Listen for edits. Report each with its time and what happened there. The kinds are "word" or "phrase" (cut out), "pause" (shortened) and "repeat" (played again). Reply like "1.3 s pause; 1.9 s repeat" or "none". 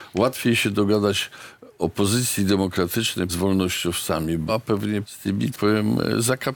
3.3 s word; 4.5 s word; 5.0 s word; 5.5 s word